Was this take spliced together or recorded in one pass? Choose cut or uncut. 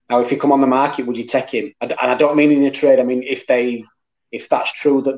uncut